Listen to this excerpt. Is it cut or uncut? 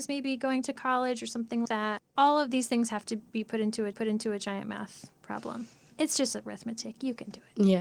cut